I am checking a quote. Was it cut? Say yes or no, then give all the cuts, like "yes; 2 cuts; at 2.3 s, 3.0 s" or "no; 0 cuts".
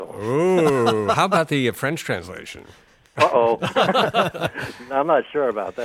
no; 0 cuts